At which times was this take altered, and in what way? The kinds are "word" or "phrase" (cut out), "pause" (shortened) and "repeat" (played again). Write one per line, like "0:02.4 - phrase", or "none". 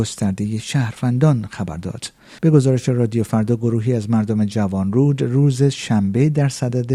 0:02.4 - pause